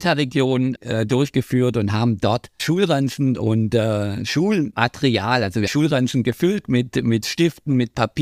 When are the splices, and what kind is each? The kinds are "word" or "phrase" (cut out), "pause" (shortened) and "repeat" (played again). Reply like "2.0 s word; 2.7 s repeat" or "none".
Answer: 2.6 s word; 5.7 s phrase

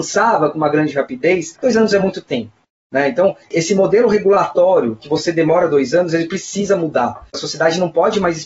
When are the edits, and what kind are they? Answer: none

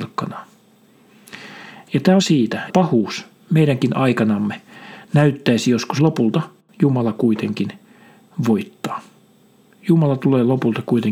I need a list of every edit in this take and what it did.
2.2 s phrase; 2.7 s phrase; 6.0 s phrase

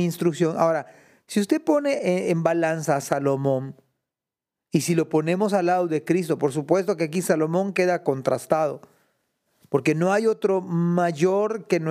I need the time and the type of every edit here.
none

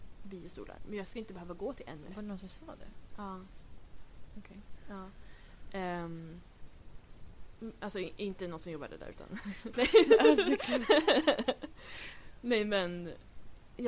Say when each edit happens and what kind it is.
9.7 s word

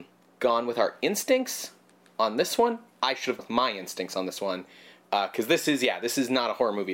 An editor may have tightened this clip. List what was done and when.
3.4 s word

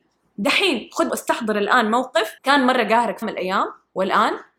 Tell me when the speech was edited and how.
1.1 s word; 2.4 s pause; 3.2 s word

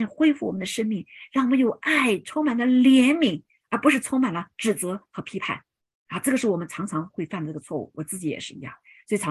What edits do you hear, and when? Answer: none

